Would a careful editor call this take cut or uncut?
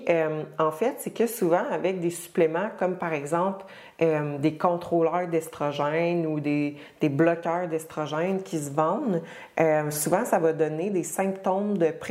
uncut